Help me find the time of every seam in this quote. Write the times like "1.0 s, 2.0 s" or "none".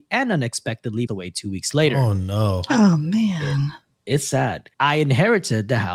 1.1 s, 4.7 s